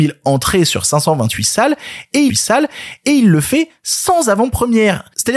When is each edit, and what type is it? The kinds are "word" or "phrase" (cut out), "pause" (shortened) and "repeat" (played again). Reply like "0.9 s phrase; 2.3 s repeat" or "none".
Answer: 2.3 s repeat